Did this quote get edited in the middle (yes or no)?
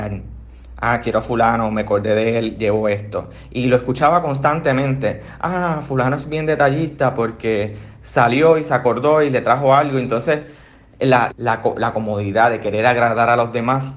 yes